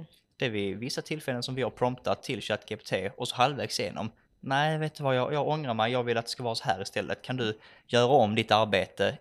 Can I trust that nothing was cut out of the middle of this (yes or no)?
yes